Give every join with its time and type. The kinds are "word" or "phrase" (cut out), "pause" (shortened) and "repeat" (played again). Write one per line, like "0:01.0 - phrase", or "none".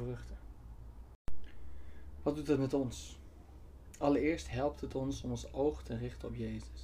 none